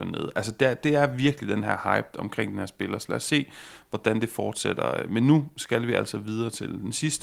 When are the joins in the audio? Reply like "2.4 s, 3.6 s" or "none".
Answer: none